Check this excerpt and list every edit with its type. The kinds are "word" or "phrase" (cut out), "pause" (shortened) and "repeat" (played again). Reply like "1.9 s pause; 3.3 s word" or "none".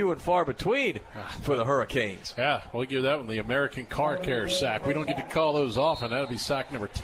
none

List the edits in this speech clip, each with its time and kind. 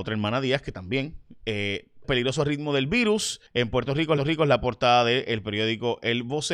2.0 s word; 3.5 s pause; 4.2 s repeat

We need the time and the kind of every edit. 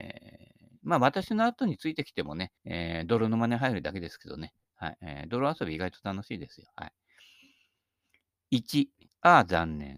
2.6 s pause; 9.1 s pause

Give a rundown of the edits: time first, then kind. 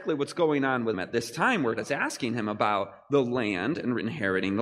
0.9 s word; 1.8 s word

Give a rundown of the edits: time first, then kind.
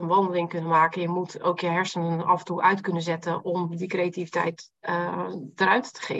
none

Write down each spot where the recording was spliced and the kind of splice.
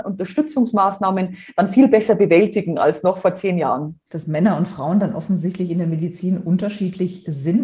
4.1 s pause

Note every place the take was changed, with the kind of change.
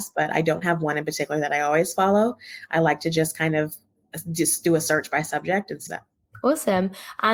5.9 s phrase

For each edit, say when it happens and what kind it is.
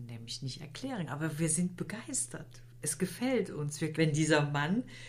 1.1 s word; 3.9 s word

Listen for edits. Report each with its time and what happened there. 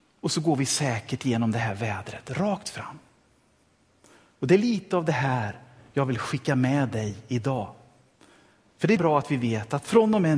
9.0 s word

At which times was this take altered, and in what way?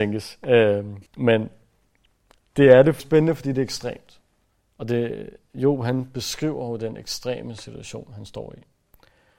1.1 s pause; 3.0 s phrase; 4.5 s pause

